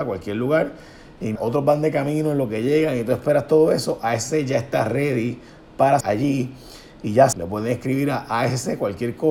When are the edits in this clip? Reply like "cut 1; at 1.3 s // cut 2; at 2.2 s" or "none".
cut 1; at 1.4 s // cut 2; at 6.0 s // cut 3; at 7.3 s